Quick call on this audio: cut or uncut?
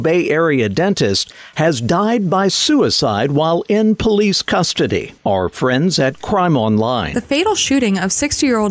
cut